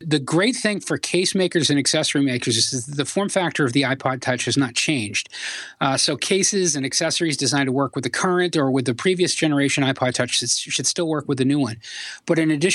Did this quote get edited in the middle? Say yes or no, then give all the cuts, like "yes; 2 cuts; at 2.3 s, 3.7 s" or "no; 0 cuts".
no; 0 cuts